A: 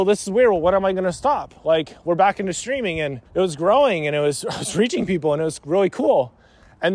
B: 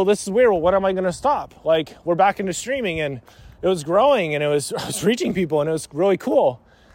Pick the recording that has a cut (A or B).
A